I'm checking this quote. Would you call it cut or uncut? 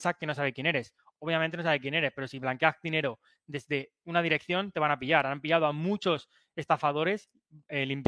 uncut